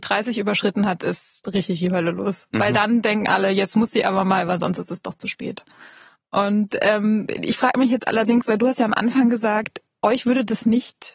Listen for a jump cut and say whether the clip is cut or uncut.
uncut